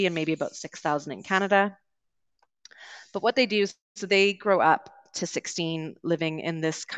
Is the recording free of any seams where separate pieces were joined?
yes; 0 cuts

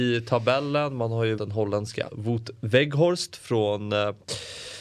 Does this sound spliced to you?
yes; 2 cuts; at 1.4 s, 2.1 s

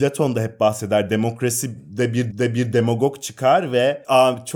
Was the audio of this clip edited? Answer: yes; 1 cut; at 2.3 s

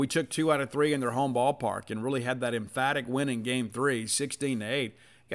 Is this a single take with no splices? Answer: yes; 0 cuts

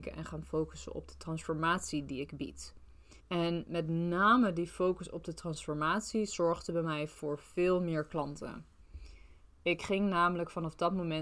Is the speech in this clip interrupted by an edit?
yes; 1 cut; at 3.2 s

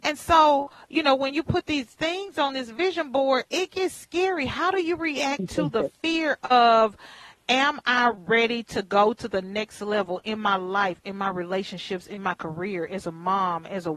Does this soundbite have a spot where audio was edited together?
no; 0 cuts

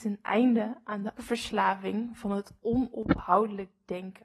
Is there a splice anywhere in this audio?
yes; 1 cut; at 1.2 s

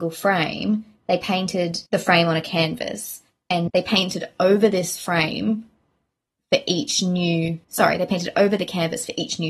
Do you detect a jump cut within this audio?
yes; 3 cuts; at 1.9 s, 3.7 s, 7.6 s

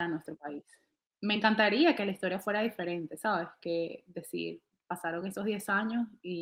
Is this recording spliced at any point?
no; 0 cuts

